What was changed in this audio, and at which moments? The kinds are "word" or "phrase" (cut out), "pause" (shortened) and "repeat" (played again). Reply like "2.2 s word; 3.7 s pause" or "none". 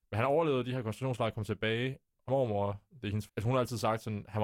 2.3 s word; 3.3 s word